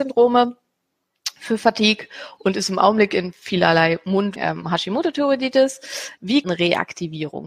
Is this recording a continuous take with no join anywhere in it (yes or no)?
no